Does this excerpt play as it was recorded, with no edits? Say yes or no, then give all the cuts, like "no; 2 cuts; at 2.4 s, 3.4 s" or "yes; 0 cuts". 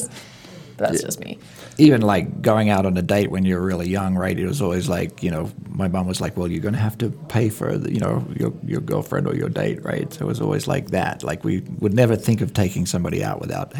yes; 0 cuts